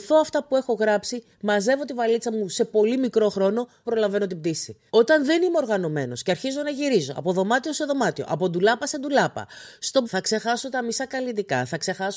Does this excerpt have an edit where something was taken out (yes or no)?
yes